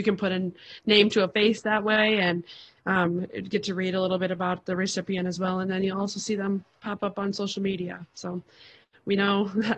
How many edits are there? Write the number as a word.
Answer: zero